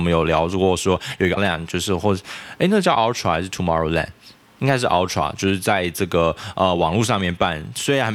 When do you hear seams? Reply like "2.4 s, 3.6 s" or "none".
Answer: 1.4 s